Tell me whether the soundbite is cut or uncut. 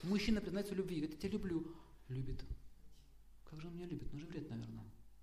uncut